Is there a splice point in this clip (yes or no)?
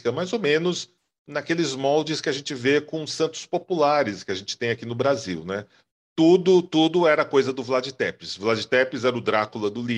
no